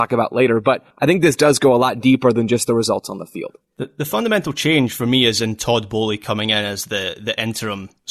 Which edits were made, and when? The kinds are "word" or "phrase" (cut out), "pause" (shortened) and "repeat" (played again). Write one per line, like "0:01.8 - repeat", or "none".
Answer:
0:00.9 - pause